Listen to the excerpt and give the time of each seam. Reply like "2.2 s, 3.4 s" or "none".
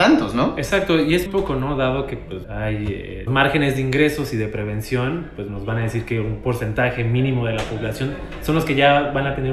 1.3 s, 2.4 s, 3.3 s, 5.5 s